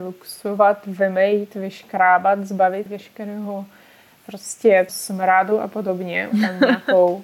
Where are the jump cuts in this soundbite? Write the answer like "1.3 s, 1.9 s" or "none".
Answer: 2.9 s, 4.9 s, 6.3 s